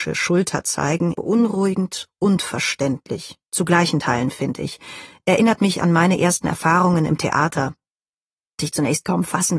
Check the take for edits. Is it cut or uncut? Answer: cut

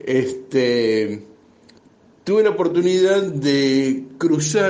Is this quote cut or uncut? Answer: cut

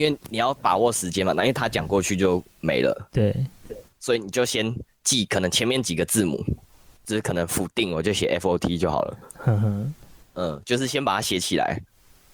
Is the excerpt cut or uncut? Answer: cut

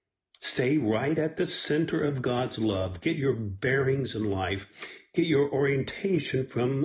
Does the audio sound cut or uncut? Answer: uncut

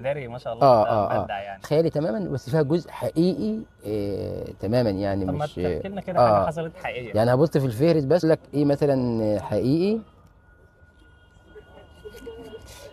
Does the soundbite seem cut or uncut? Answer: cut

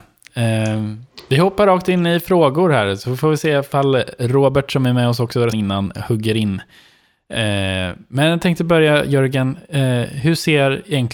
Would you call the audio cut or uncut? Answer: cut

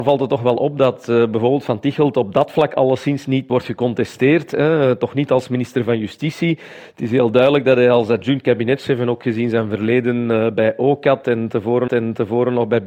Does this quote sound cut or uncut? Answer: cut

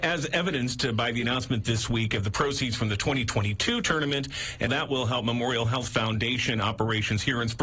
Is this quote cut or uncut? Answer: cut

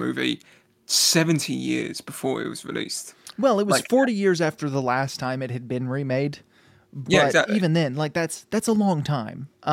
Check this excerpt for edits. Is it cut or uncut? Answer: uncut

